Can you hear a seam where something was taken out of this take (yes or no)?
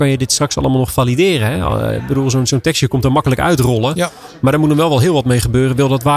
no